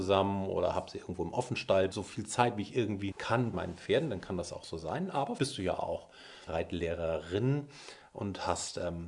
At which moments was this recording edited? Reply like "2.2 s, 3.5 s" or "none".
1.9 s, 3.1 s, 3.5 s, 5.4 s, 6.5 s